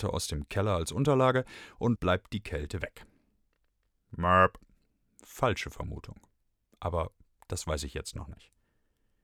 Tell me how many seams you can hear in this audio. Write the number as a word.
one